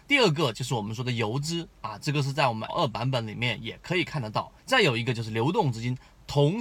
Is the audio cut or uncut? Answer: cut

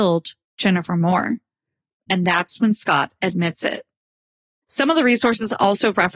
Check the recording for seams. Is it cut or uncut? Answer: uncut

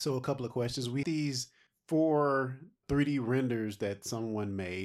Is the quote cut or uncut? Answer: cut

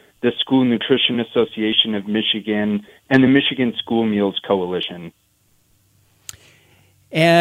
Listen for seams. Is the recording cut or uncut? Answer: uncut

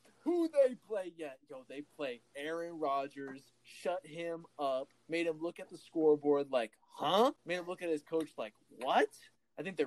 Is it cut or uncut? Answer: cut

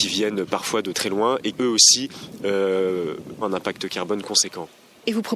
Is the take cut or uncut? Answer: cut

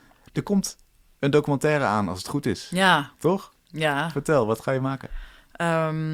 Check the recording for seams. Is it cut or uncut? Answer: uncut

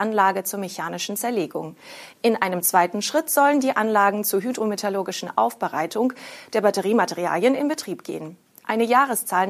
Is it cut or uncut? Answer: uncut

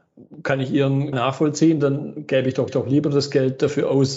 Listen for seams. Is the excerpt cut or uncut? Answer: cut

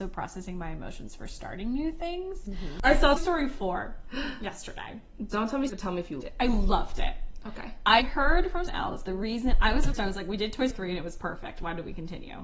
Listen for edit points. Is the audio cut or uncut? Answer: cut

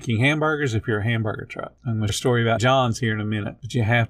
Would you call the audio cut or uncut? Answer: cut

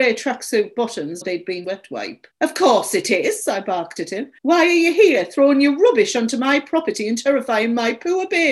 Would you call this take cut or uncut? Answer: cut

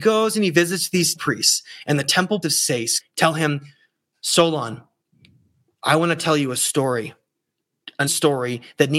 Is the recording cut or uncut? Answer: cut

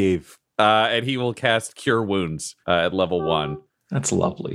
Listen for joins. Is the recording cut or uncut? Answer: cut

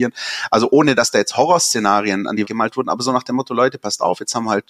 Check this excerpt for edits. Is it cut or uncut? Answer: cut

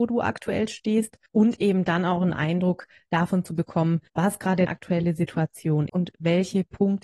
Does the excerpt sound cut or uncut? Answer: cut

